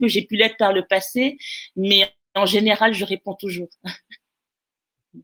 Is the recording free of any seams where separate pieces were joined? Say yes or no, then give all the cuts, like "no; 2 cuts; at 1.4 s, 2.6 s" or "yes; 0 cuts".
yes; 0 cuts